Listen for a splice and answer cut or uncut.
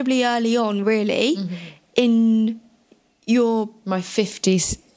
uncut